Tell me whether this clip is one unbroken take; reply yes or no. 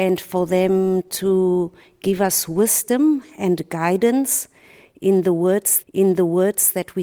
no